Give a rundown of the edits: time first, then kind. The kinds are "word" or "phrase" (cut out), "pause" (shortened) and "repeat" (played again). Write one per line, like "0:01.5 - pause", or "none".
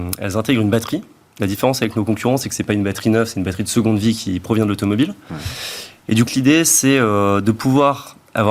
0:06.3 - phrase